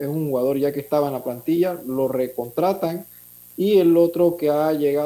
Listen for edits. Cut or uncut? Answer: uncut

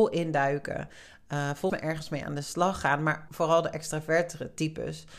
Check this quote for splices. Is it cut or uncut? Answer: cut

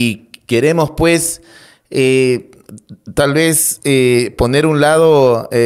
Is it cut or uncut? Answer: uncut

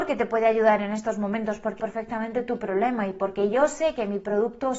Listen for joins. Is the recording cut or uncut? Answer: cut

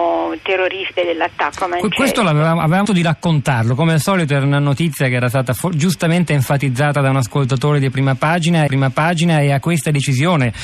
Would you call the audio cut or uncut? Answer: cut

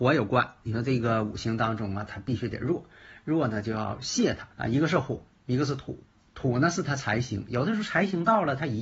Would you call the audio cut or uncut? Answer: cut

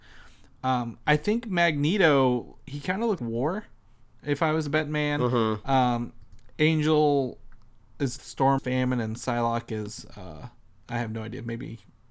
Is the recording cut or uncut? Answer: cut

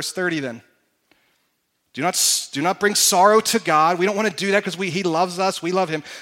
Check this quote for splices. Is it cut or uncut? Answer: uncut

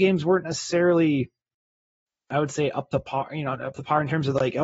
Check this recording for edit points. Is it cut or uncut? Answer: uncut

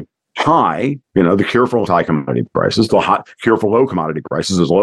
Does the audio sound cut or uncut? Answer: cut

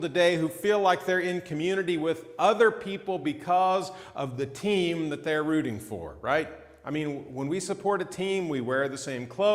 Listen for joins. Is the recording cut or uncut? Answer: uncut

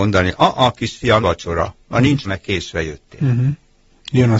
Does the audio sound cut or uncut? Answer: cut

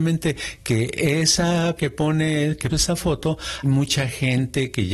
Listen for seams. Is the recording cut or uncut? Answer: cut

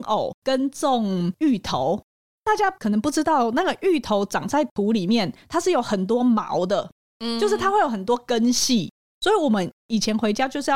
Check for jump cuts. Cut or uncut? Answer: uncut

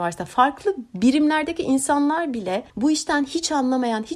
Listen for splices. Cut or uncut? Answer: cut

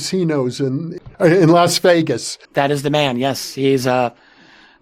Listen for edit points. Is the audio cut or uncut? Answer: cut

